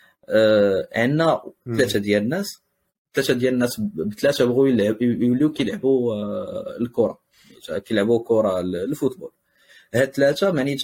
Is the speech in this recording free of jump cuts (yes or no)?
yes